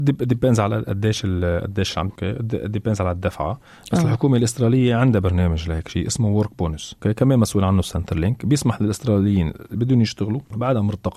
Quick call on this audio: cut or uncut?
cut